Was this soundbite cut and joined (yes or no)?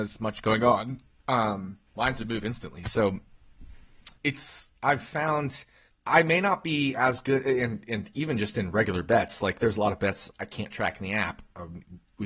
yes